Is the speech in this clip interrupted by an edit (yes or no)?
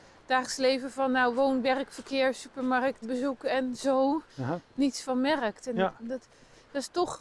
yes